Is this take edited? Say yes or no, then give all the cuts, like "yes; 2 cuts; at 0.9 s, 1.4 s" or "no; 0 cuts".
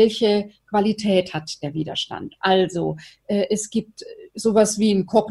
no; 0 cuts